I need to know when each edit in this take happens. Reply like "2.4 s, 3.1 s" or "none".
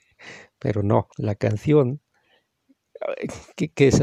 1.1 s